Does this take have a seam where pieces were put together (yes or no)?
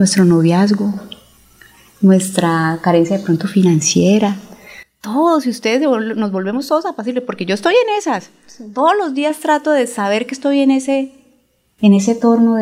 no